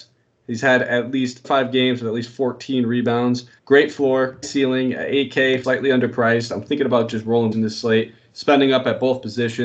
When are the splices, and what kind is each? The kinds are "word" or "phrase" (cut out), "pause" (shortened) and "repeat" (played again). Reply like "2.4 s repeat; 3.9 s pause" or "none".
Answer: 1.4 s phrase; 3.6 s pause; 4.4 s word; 5.6 s word; 7.5 s phrase